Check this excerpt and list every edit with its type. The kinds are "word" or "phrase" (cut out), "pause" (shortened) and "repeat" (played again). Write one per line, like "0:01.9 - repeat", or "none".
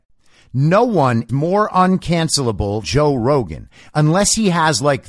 0:01.3 - word
0:02.8 - word